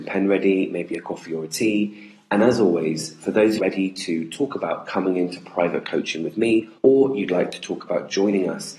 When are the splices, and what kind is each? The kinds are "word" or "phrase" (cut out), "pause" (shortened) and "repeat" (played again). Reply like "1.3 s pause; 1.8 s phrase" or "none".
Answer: 3.6 s phrase; 6.8 s pause